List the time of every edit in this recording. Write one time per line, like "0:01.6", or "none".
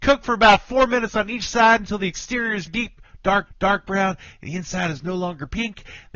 0:02.7
0:03.5